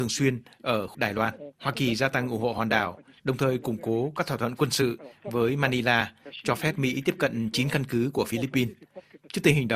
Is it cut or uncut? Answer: cut